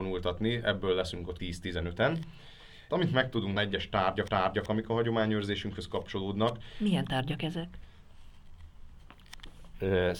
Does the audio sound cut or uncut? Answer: cut